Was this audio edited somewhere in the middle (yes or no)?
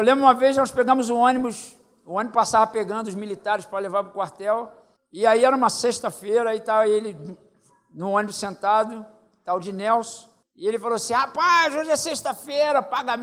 no